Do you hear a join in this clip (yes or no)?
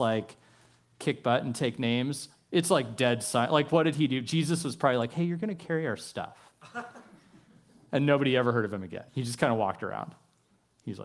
yes